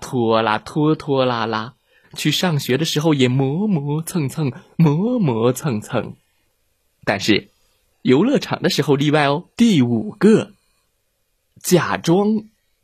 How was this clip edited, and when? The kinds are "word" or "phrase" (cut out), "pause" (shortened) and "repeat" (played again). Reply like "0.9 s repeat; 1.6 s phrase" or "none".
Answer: 2.0 s phrase; 7.9 s phrase; 9.5 s pause